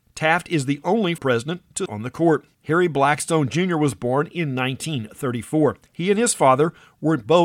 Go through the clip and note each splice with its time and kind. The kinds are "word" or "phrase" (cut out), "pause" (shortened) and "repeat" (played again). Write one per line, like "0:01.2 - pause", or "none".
0:01.2 - word
0:01.9 - word
0:02.5 - pause
0:05.9 - pause